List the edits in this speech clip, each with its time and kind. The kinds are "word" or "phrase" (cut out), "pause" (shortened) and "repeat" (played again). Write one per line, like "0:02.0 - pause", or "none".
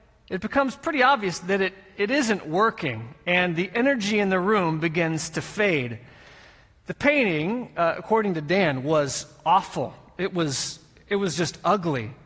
none